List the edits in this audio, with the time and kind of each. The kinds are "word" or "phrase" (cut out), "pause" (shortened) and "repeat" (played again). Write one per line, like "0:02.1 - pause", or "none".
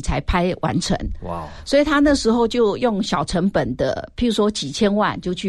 none